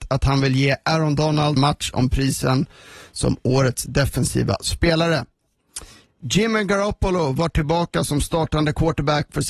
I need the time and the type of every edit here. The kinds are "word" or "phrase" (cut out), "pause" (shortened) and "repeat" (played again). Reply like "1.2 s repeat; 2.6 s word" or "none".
1.6 s word